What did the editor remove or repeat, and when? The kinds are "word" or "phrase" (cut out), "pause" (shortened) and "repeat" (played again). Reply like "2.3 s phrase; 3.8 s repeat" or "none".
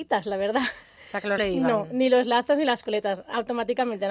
1.4 s phrase